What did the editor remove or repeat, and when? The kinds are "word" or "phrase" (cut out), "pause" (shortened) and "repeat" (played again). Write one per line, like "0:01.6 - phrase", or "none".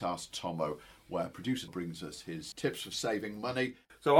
0:01.7 - word
0:02.5 - word